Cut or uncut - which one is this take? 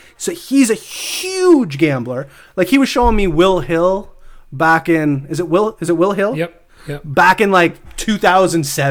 uncut